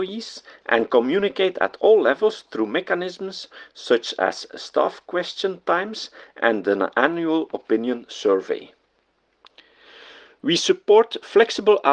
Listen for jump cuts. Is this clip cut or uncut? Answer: uncut